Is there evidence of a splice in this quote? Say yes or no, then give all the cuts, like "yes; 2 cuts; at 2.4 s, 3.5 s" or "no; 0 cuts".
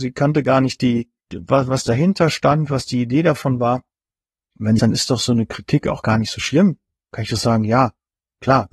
yes; 2 cuts; at 1.2 s, 4.8 s